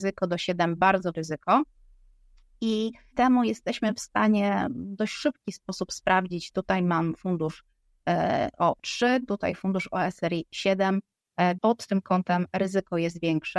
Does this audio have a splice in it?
yes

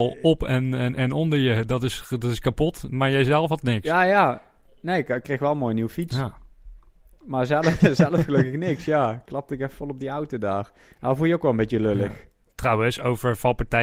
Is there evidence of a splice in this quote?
no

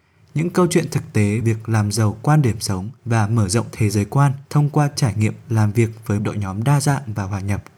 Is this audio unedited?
no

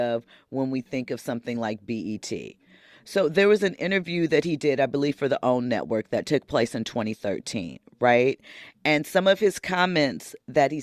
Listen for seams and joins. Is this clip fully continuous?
yes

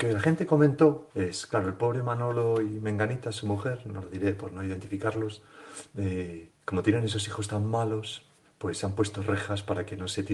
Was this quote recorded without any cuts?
no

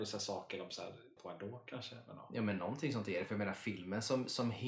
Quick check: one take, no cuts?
no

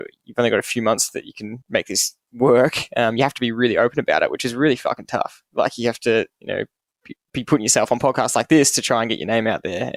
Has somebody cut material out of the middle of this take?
yes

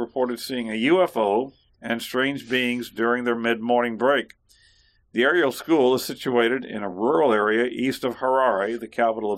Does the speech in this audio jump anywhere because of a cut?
no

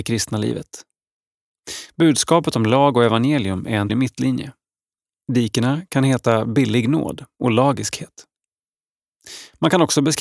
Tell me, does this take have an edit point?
yes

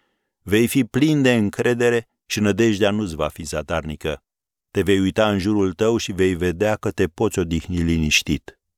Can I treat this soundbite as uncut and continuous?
yes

